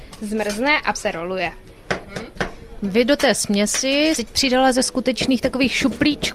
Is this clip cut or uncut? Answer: cut